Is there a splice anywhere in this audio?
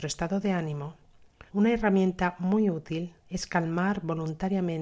yes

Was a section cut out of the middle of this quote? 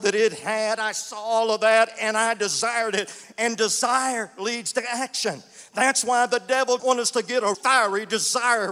yes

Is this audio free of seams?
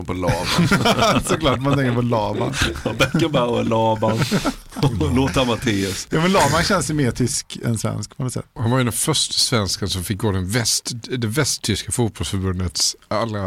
yes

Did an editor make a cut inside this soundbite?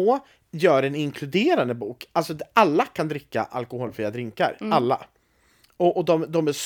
no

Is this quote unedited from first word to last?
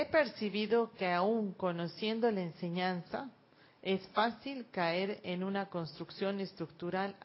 yes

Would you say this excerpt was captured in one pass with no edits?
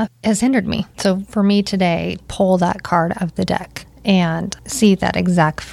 no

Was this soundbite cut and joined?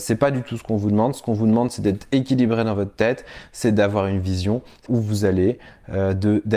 yes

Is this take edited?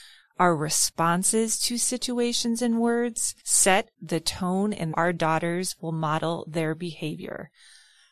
yes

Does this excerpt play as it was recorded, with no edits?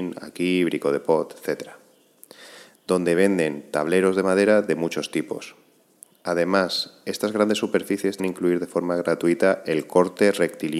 no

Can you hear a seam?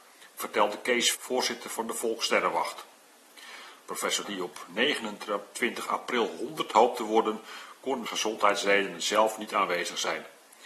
yes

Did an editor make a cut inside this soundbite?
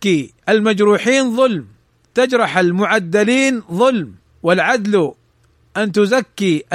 yes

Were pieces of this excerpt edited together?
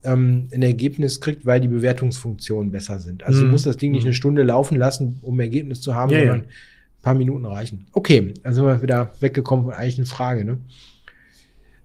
no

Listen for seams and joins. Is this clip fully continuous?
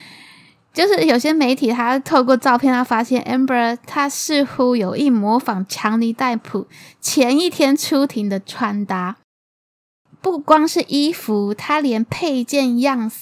yes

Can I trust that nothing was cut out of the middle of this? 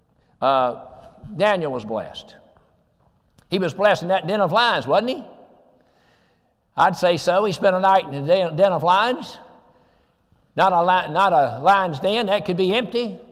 yes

